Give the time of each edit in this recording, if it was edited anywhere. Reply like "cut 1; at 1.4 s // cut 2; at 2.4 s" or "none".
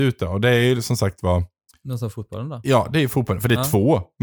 cut 1; at 1.7 s

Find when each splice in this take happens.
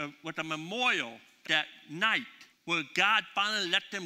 cut 1; at 1.4 s // cut 2; at 2.5 s

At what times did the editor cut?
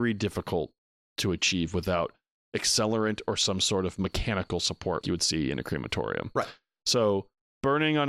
cut 1; at 5.0 s

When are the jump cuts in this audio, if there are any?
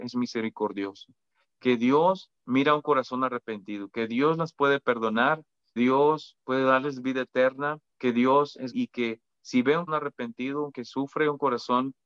cut 1; at 2.4 s // cut 2; at 5.8 s // cut 3; at 7.9 s // cut 4; at 8.7 s // cut 5; at 9.9 s // cut 6; at 10.7 s

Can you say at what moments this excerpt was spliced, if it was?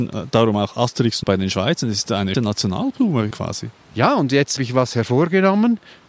cut 1; at 1.2 s // cut 2; at 2.3 s // cut 3; at 3.3 s // cut 4; at 4.6 s

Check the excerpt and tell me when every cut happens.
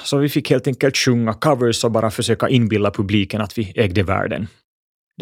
none

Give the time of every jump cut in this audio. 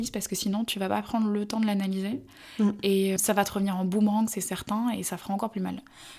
cut 1; at 3.2 s

